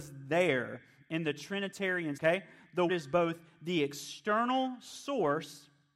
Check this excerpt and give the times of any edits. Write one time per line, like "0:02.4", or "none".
0:02.2
0:02.9